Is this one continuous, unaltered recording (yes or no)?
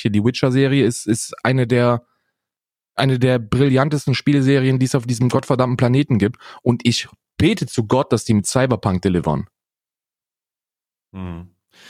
yes